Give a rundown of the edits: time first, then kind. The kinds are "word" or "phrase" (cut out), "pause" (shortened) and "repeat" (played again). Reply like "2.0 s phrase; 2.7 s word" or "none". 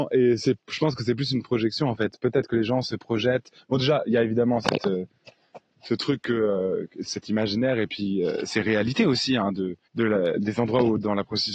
9.8 s pause